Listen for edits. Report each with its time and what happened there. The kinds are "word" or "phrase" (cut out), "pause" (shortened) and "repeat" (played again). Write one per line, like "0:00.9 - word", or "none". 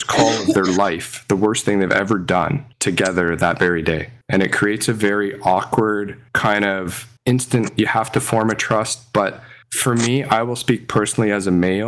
0:02.7 - pause
0:04.2 - pause
0:06.3 - pause
0:07.2 - pause
0:09.6 - pause